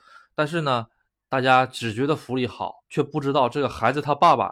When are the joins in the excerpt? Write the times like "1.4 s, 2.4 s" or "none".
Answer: 2.8 s